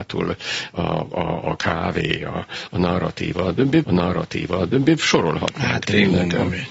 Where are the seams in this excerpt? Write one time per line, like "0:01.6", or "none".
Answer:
0:03.8